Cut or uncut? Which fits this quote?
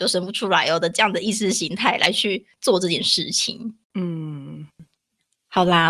cut